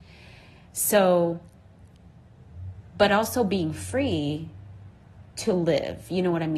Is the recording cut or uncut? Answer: uncut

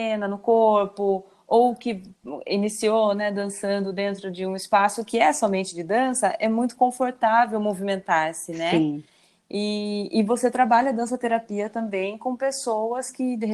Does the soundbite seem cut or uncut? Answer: uncut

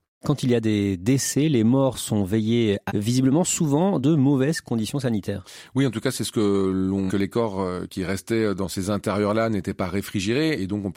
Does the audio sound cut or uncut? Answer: cut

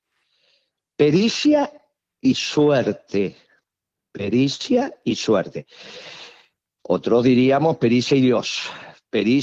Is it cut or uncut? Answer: uncut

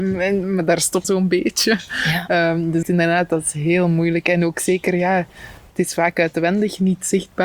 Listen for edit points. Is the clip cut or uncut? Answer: cut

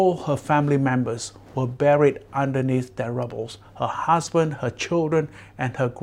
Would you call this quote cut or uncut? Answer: uncut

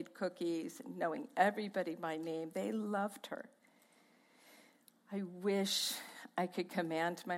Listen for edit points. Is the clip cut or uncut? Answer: uncut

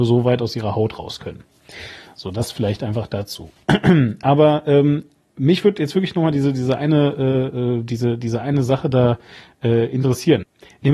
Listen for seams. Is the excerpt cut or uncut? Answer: uncut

